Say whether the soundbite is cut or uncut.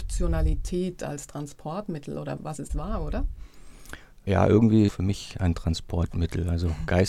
cut